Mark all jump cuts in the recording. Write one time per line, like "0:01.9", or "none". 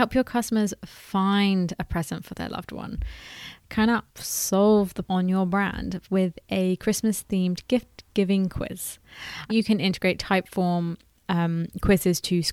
0:04.1
0:05.0
0:09.5